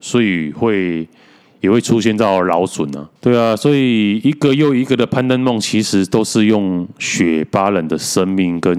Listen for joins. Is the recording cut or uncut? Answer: cut